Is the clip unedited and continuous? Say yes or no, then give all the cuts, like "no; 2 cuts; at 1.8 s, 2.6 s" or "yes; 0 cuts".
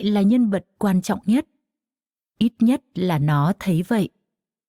yes; 0 cuts